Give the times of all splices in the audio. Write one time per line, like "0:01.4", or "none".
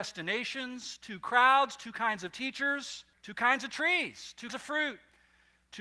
0:03.1
0:04.5